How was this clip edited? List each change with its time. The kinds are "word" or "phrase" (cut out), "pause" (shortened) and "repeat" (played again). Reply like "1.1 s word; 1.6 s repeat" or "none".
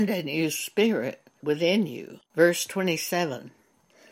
1.4 s phrase; 2.3 s pause